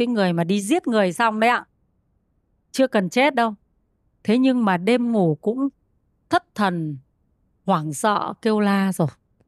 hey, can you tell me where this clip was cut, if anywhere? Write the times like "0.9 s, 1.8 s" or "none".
none